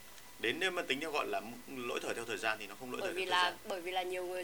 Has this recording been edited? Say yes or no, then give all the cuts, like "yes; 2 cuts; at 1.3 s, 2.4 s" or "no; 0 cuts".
no; 0 cuts